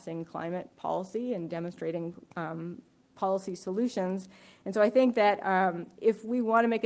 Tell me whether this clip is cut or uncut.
uncut